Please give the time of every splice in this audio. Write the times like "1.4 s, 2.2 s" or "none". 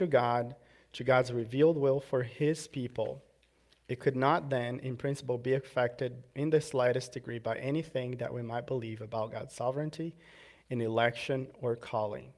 none